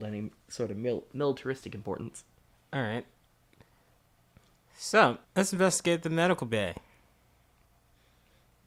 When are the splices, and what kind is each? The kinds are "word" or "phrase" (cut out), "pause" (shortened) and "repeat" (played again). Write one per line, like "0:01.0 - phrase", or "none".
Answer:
0:05.2 - pause

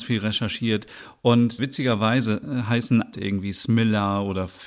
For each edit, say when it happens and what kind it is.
0:01.6 - word
0:03.1 - phrase

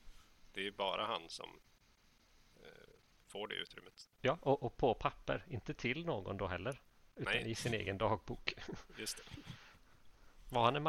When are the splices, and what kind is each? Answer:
none

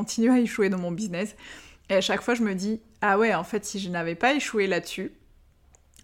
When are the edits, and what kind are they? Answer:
none

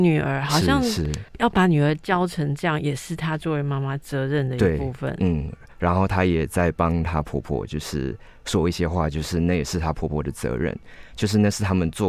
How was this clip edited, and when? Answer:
0:01.3 - pause

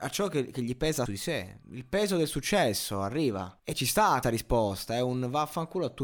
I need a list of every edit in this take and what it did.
0:01.1 - phrase
0:01.6 - pause
0:03.6 - pause
0:04.2 - word

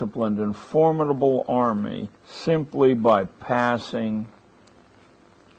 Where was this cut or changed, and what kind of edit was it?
0:02.2 - pause

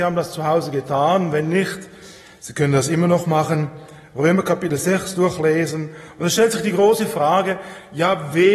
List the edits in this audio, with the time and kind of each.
none

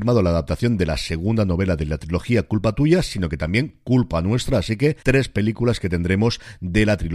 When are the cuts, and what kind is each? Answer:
0:05.0 - pause

